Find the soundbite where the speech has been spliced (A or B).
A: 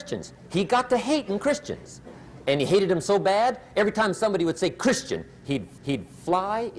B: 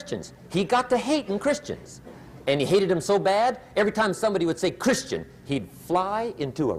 A